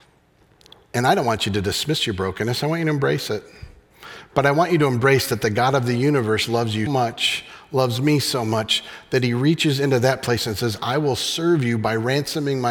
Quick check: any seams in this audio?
yes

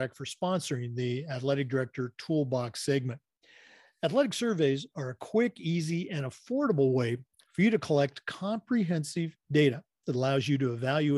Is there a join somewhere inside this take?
no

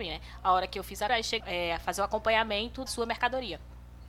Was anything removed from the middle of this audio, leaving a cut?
yes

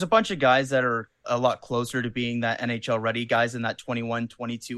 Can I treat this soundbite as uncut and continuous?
no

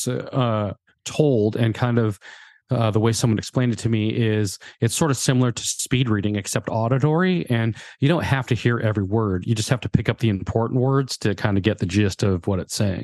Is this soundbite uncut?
yes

